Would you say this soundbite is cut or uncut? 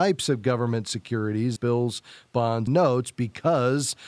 cut